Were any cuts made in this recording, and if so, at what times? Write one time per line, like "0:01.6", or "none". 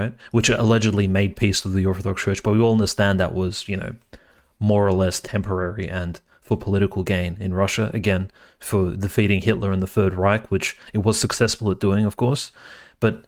none